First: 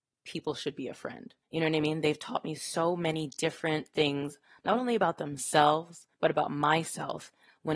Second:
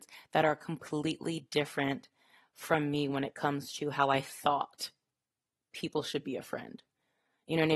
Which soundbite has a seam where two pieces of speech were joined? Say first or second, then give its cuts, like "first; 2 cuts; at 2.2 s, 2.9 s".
first; 2 cuts; at 1.4 s, 6.1 s